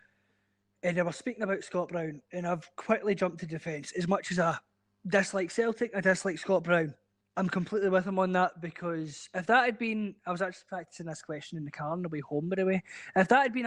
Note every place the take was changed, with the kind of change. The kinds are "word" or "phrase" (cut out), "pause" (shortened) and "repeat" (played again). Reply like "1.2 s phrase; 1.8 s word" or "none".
4.9 s pause; 7.2 s pause

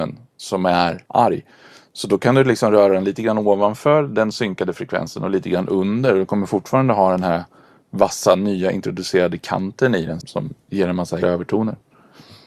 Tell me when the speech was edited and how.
1.1 s pause; 10.2 s word; 11.2 s word

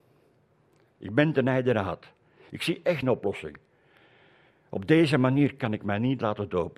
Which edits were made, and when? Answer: 3.0 s word

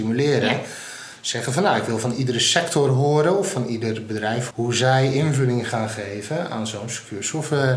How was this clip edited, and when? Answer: 4.5 s word

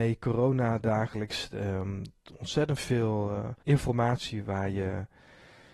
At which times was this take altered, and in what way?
3.6 s pause

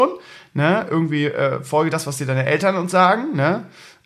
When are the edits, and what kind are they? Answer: none

